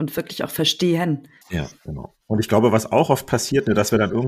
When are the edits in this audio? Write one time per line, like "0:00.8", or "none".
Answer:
0:02.2